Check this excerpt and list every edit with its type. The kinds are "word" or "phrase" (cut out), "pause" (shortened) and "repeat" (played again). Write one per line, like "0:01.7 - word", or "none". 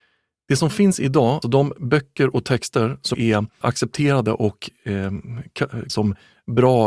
0:01.4 - word
0:03.1 - word
0:03.6 - word
0:05.9 - word